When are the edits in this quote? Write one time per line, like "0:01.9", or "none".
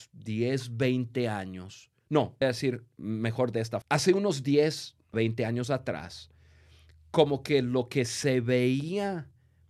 0:02.0
0:02.4
0:03.8
0:05.1